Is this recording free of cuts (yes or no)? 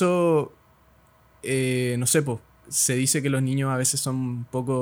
yes